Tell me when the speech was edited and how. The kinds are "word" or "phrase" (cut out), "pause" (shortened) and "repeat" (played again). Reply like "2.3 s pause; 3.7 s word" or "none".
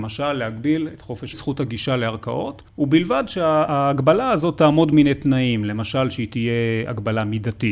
1.3 s phrase; 2.7 s pause; 4.9 s word